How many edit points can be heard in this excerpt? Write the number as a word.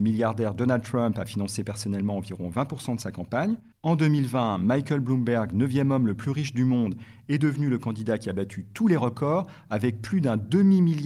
zero